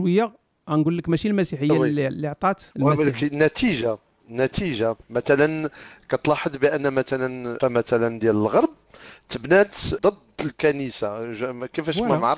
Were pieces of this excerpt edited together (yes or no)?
yes